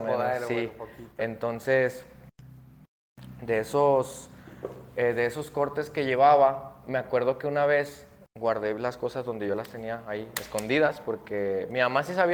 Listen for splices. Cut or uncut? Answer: uncut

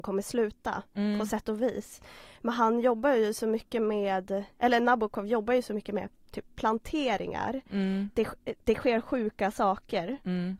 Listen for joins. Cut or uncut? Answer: uncut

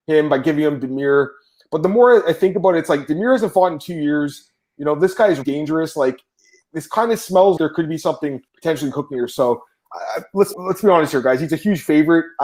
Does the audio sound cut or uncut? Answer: cut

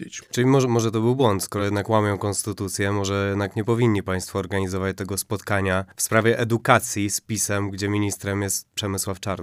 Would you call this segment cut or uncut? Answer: uncut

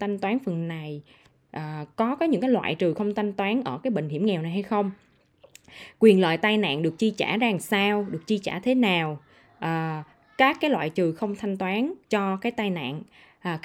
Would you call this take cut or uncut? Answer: cut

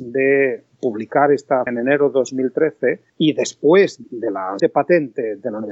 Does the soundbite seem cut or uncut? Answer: cut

